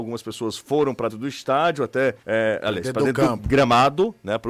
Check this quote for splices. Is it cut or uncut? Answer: cut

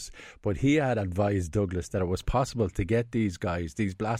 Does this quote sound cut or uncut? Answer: uncut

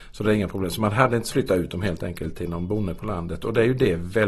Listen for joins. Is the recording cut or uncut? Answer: cut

